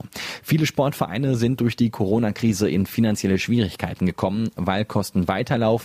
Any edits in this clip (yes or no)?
no